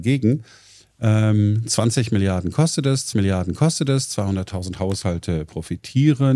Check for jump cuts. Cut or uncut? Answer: cut